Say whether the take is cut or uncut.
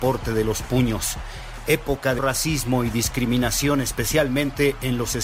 cut